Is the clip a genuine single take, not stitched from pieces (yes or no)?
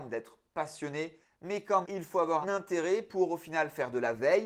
no